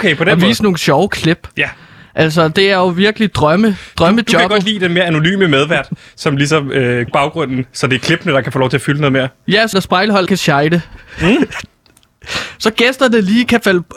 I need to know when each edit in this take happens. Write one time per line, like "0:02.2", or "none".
0:07.1
0:09.7
0:10.3